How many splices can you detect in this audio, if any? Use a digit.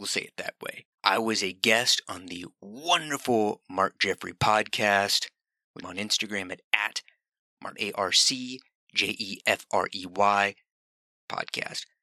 4